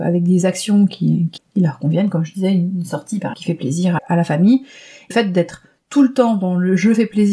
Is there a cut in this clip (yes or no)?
yes